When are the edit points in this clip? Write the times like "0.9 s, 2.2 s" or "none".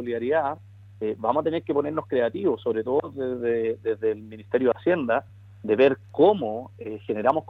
none